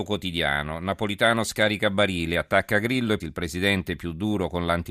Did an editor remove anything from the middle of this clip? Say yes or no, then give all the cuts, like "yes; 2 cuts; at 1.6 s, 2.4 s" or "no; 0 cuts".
yes; 1 cut; at 3.2 s